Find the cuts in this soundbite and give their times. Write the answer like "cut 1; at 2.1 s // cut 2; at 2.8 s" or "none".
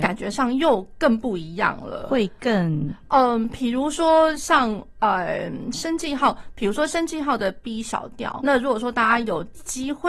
cut 1; at 8.4 s